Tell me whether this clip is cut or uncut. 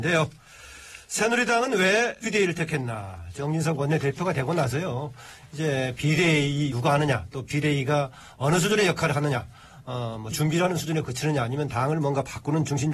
cut